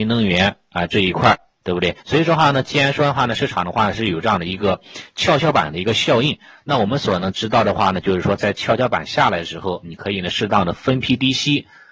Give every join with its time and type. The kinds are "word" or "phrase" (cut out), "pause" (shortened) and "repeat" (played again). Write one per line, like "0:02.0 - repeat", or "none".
0:02.0 - pause